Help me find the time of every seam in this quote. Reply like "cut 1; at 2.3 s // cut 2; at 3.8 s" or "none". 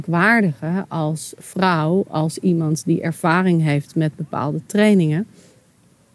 none

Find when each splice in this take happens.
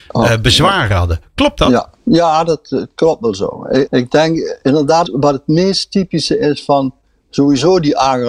cut 1; at 1.9 s // cut 2; at 3.9 s // cut 3; at 5.1 s

